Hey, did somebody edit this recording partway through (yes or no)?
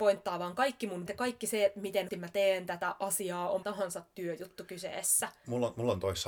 yes